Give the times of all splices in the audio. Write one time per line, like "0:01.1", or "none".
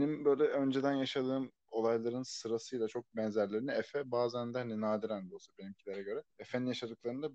0:06.3